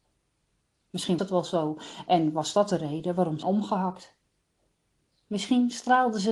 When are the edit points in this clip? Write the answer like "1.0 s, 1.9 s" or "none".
1.2 s, 3.4 s